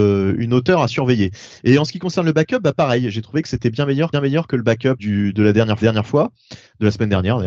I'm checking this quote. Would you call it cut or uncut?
cut